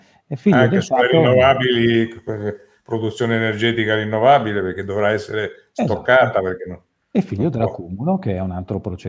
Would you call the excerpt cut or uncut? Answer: uncut